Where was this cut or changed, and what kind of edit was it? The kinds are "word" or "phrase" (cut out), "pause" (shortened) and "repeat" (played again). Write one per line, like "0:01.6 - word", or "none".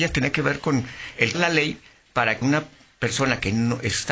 0:01.3 - word
0:02.4 - word